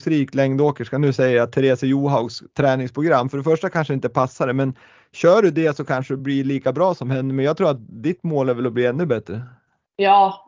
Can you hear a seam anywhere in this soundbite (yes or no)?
no